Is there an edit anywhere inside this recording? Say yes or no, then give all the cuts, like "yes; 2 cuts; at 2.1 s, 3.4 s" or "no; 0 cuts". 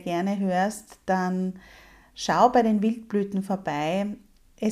no; 0 cuts